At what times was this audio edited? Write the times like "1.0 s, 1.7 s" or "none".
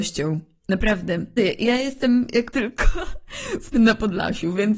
1.4 s, 2.5 s, 3.7 s